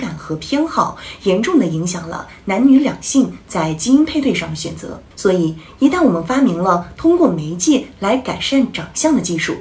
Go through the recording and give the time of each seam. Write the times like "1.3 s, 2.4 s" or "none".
5.1 s